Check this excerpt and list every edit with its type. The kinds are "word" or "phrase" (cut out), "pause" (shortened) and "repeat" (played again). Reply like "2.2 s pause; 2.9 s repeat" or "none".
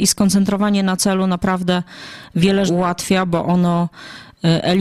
2.7 s word

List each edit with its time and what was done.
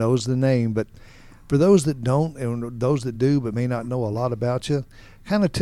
none

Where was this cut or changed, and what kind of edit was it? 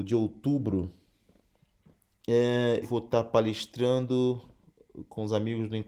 2.8 s word

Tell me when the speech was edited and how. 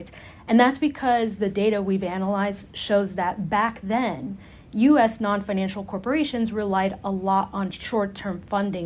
none

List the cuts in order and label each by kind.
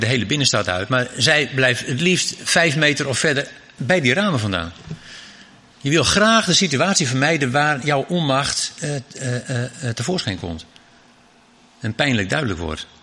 none

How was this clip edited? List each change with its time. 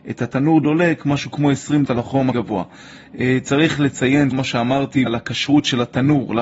1.8 s word; 2.3 s word; 4.3 s word; 5.1 s phrase

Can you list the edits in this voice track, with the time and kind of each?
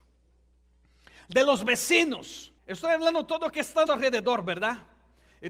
2.6 s pause; 3.9 s word

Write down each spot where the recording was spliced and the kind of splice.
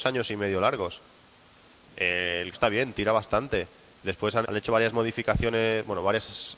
2.5 s word; 4.4 s word

